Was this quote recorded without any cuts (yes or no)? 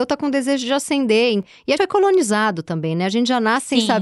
no